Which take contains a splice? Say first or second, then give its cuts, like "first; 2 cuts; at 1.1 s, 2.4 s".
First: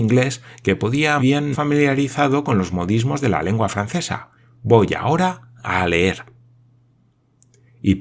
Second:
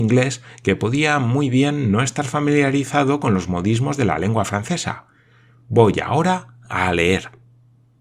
first; 3 cuts; at 1.2 s, 1.5 s, 4.4 s